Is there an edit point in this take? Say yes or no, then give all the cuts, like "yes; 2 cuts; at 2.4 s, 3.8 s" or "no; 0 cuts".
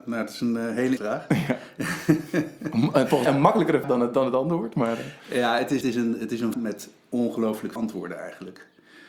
yes; 6 cuts; at 1.0 s, 3.3 s, 3.8 s, 5.8 s, 6.5 s, 7.8 s